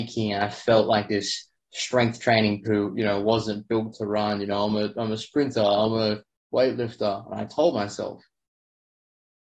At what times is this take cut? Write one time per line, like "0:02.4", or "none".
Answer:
0:02.6